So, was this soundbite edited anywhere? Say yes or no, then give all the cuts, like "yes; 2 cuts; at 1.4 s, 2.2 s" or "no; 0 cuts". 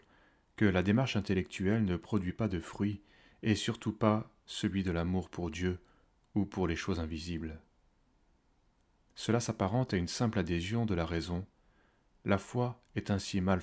no; 0 cuts